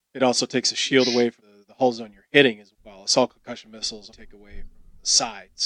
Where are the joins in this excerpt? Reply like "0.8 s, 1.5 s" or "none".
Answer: 1.4 s, 2.7 s, 4.1 s